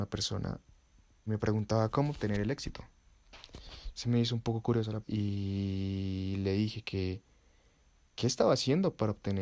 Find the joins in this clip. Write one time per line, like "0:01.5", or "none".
0:01.3
0:05.0